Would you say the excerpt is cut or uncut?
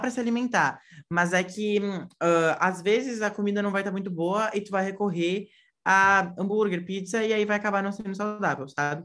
uncut